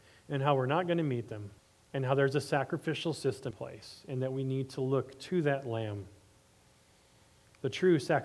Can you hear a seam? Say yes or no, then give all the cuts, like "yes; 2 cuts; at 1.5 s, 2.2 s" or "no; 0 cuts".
yes; 2 cuts; at 1.6 s, 3.5 s